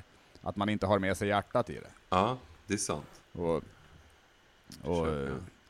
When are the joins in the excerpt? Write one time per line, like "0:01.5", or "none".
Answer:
none